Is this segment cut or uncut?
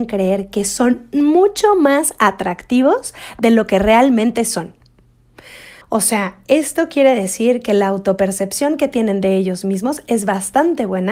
cut